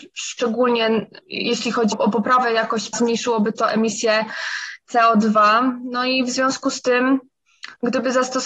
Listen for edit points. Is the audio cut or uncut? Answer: cut